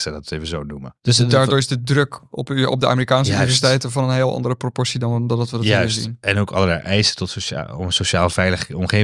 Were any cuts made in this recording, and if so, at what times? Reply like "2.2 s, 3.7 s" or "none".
1.0 s